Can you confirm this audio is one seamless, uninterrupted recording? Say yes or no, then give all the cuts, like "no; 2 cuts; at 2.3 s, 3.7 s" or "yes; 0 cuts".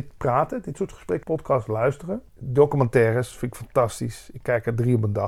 no; 2 cuts; at 1.2 s, 2.3 s